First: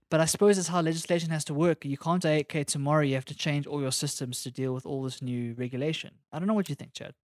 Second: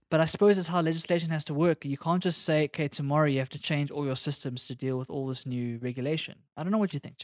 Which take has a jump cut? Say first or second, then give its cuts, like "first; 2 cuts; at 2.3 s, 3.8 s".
first; 1 cut; at 2.2 s